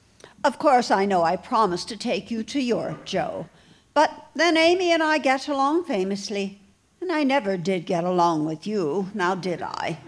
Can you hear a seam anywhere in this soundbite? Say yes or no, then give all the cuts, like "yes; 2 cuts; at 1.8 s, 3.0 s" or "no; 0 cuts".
no; 0 cuts